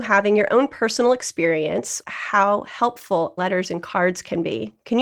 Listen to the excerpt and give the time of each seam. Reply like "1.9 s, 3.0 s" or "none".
2.0 s, 3.4 s